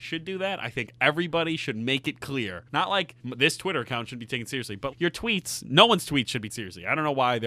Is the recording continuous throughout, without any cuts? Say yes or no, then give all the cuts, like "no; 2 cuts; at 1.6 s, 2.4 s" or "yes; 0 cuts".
no; 4 cuts; at 2.7 s, 3.2 s, 4.9 s, 6.5 s